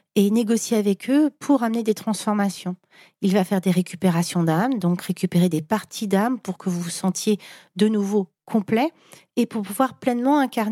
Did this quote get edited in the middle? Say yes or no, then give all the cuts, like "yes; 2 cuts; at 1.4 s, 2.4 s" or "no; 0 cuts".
no; 0 cuts